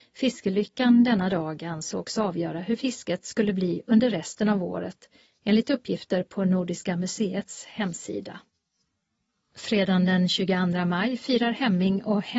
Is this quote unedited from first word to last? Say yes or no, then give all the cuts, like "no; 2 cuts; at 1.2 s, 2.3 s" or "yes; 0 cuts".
yes; 0 cuts